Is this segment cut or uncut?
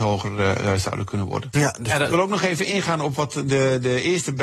uncut